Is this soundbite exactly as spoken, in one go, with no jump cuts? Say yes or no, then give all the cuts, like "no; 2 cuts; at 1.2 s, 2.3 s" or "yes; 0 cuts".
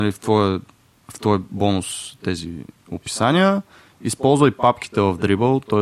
yes; 0 cuts